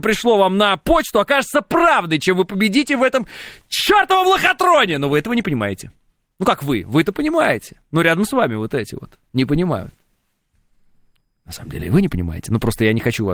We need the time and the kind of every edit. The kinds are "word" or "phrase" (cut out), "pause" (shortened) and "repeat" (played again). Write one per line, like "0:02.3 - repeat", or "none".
none